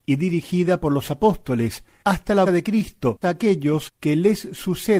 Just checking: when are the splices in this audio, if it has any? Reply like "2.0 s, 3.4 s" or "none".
2.5 s, 3.2 s